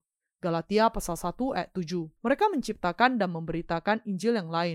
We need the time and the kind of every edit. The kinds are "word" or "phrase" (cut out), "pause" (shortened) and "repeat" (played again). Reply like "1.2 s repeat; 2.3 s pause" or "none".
2.2 s pause

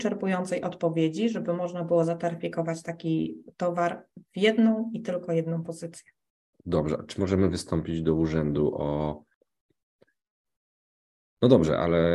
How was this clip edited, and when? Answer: none

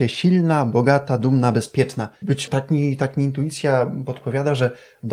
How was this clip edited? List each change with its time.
2.5 s word

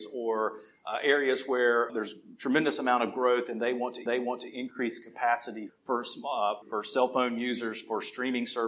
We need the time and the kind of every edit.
1.9 s word; 4.1 s repeat; 5.7 s word; 6.6 s word

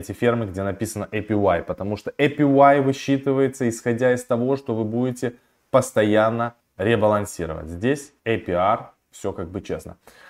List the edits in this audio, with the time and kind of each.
6.6 s pause; 8.2 s pause

